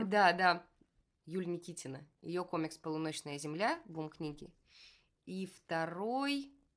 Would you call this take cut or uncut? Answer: uncut